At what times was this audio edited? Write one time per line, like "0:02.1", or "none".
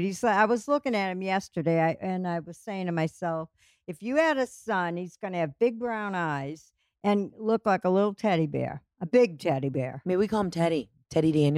none